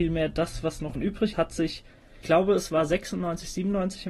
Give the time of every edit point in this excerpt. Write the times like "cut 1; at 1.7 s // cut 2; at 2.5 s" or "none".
cut 1; at 0.9 s // cut 2; at 1.3 s // cut 3; at 2.2 s